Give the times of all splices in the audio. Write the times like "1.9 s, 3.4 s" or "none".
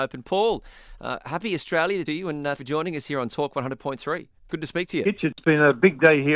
2.1 s, 2.6 s, 4.4 s